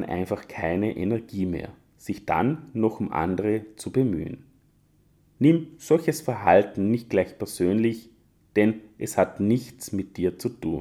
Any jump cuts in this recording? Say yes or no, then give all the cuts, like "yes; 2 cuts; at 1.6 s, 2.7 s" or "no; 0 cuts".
no; 0 cuts